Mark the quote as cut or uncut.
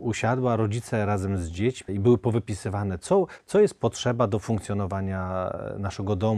cut